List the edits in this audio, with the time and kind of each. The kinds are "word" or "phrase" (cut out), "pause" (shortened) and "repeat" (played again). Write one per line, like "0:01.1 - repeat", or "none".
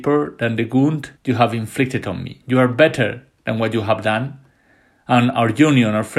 0:01.2 - pause